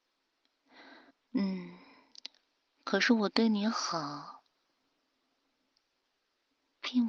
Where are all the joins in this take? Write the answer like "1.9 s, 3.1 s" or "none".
1.1 s